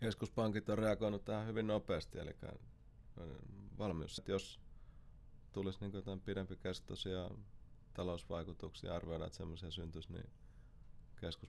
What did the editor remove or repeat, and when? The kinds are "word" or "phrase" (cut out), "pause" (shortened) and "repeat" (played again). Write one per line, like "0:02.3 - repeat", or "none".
0:04.2 - word
0:05.5 - word